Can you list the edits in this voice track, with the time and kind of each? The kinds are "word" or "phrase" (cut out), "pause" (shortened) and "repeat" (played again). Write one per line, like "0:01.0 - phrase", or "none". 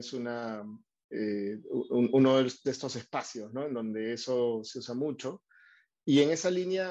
none